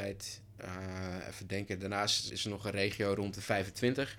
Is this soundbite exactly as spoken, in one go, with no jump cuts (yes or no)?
no